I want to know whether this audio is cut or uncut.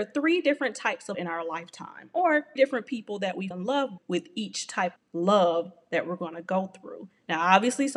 cut